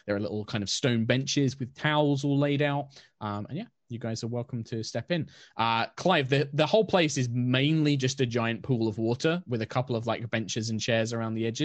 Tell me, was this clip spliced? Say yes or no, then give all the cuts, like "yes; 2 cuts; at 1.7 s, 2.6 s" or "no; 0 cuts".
no; 0 cuts